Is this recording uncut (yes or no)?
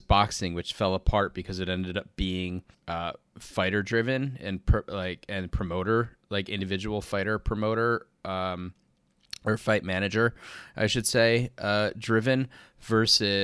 no